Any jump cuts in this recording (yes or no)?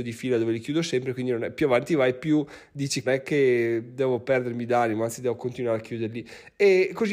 yes